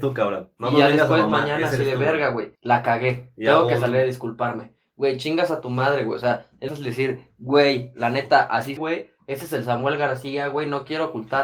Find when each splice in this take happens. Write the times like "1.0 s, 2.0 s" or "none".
2.5 s, 6.7 s, 8.8 s